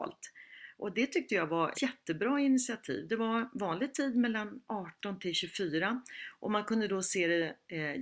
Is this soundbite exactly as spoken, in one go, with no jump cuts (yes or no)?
no